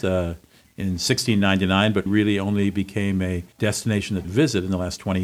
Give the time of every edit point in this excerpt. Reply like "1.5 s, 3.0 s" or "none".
2.1 s, 3.5 s, 4.2 s